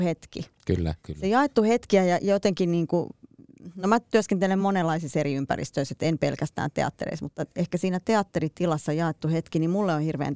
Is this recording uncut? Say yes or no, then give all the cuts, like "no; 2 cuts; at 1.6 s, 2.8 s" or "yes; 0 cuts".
yes; 0 cuts